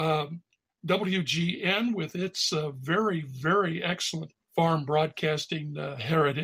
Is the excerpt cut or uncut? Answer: cut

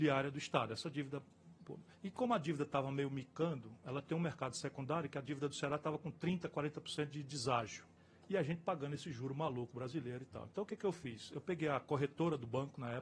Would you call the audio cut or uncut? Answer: cut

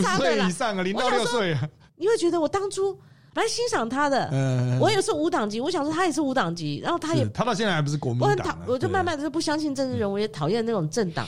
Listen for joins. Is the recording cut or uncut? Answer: uncut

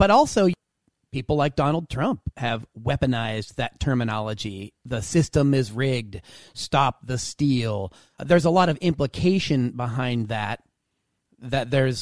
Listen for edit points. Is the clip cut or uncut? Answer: uncut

